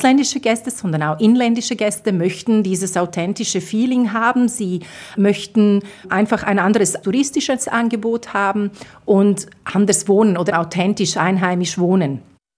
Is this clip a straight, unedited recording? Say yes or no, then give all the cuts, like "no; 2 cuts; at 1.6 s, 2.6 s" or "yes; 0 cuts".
no; 1 cut; at 10.5 s